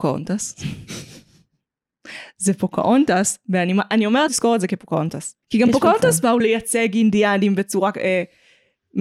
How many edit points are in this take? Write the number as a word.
three